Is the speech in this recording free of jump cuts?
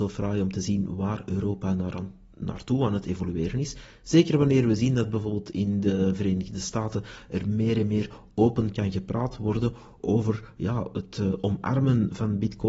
yes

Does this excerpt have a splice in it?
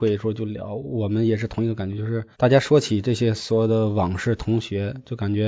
yes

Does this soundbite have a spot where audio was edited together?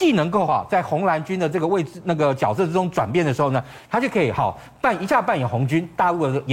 no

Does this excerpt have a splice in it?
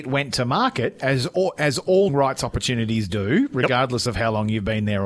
yes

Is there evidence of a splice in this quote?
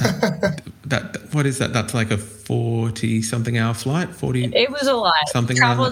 no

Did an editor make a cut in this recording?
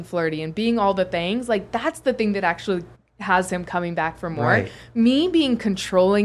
yes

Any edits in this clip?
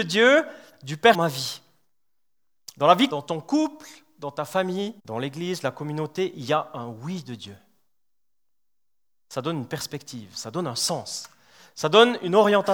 yes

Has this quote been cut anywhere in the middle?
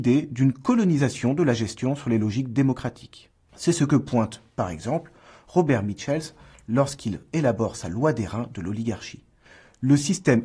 no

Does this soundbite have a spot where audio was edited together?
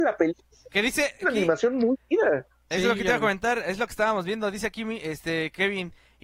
yes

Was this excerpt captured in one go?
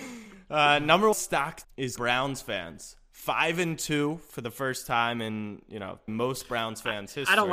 no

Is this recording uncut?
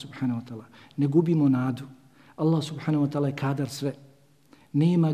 yes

